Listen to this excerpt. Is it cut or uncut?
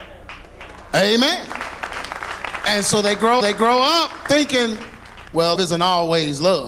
cut